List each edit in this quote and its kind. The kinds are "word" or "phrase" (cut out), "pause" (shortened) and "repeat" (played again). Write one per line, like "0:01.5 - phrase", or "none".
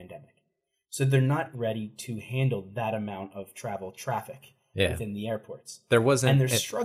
0:01.5 - word